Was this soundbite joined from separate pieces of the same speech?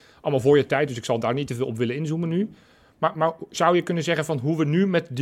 no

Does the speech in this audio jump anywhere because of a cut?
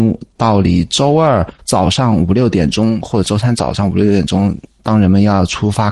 yes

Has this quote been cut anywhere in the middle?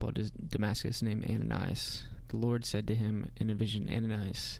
no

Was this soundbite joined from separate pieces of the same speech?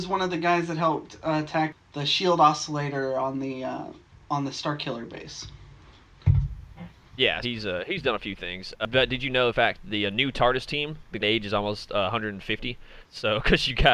yes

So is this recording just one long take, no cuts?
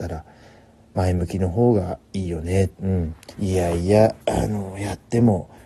no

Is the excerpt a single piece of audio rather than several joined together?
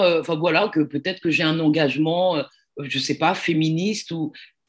yes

